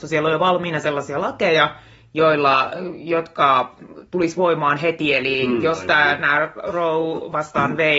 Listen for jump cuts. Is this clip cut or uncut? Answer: uncut